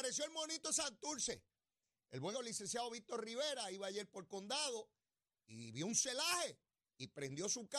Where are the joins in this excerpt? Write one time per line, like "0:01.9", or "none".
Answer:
0:02.3